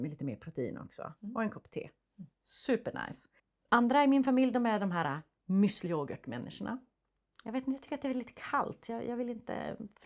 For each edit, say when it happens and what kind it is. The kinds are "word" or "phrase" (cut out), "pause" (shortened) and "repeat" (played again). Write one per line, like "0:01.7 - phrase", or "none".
0:02.3 - pause
0:03.4 - pause
0:05.9 - word